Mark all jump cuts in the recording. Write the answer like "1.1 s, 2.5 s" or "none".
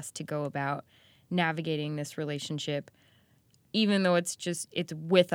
none